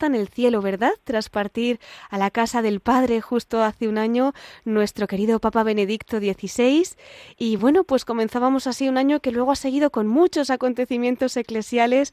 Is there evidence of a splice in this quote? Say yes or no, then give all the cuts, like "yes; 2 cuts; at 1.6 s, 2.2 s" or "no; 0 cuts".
no; 0 cuts